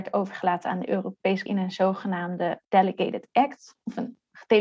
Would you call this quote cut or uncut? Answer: cut